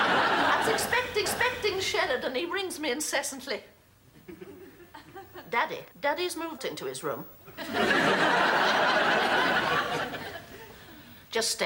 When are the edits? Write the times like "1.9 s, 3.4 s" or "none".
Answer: 1.3 s, 5.9 s, 6.6 s